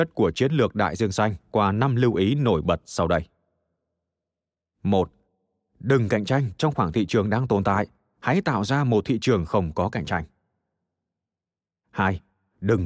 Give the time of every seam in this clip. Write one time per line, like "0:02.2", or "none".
none